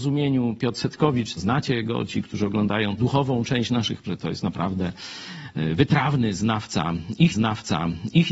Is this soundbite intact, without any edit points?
no; 4 cuts; at 1.4 s, 3.0 s, 4.0 s, 7.3 s

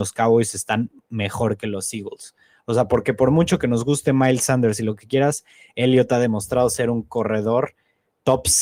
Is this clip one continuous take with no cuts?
yes; 0 cuts

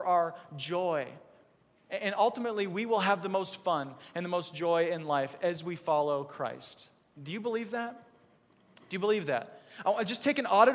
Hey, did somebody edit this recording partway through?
no; 0 cuts

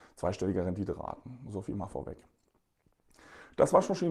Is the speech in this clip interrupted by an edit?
no; 0 cuts

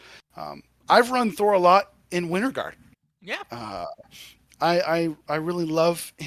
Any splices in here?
no; 0 cuts

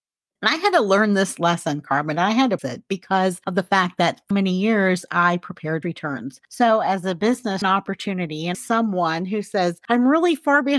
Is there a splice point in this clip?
yes; 5 cuts; at 2.6 s, 4.3 s, 5.8 s, 7.6 s, 8.5 s

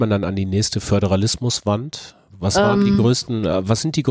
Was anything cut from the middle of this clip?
no; 0 cuts

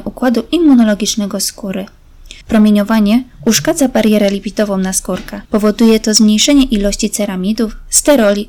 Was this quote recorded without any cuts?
no; 2 cuts; at 2.4 s, 5.4 s

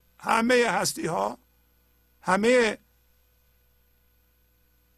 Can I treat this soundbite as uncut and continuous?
yes; 0 cuts

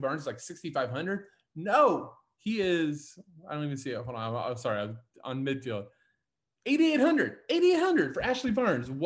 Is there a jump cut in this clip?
no; 0 cuts

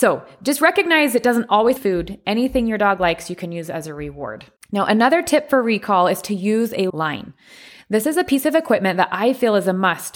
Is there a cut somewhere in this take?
yes; 3 cuts; at 1.8 s, 4.6 s, 6.9 s

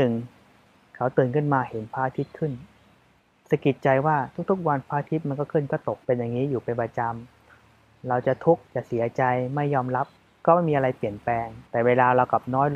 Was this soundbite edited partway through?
yes; 5 cuts; at 3.2 s, 6.0 s, 8.7 s, 10.2 s, 11.7 s

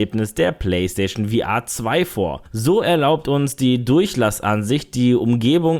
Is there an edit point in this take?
no; 0 cuts

